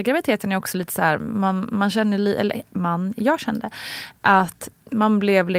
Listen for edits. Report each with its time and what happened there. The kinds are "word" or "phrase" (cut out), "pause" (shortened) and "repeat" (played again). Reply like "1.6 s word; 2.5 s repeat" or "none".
none